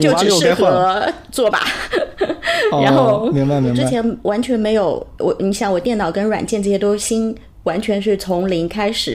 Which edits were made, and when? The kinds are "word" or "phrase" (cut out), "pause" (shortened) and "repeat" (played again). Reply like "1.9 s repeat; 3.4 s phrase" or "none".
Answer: 1.5 s word